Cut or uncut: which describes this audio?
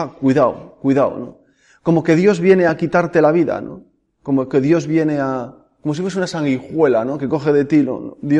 uncut